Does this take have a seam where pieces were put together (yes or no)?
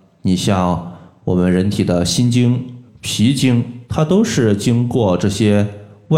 yes